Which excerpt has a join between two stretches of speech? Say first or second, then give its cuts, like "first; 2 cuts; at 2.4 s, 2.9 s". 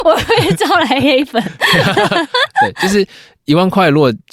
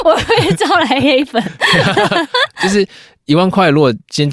second; 1 cut; at 2.5 s